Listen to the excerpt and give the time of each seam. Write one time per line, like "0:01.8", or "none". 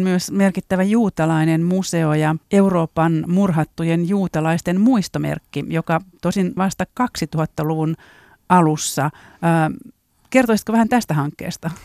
0:02.4
0:06.6